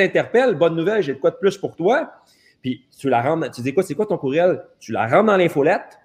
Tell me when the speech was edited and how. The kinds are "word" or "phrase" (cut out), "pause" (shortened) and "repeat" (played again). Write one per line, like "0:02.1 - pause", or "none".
none

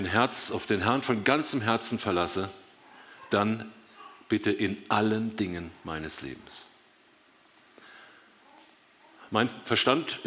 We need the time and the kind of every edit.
none

